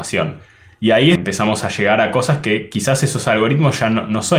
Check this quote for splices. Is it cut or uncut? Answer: cut